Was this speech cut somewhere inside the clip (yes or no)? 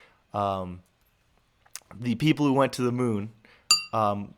no